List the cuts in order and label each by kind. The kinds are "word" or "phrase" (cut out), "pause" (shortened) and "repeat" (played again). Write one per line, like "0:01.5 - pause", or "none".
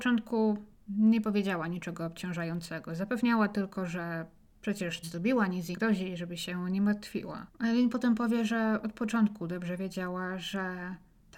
0:05.0 - phrase
0:05.7 - word
0:07.5 - pause